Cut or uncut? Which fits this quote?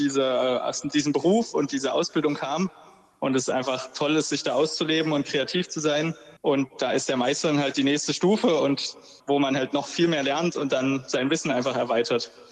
cut